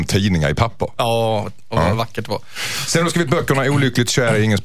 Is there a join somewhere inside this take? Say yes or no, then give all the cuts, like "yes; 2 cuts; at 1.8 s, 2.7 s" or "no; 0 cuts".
no; 0 cuts